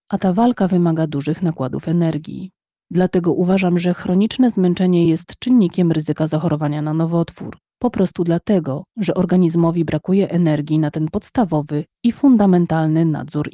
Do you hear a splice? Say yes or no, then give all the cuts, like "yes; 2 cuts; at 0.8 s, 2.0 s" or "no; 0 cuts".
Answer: no; 0 cuts